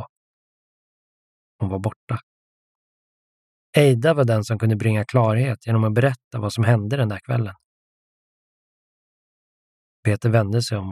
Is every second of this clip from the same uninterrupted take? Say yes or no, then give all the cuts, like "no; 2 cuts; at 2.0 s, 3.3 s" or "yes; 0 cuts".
yes; 0 cuts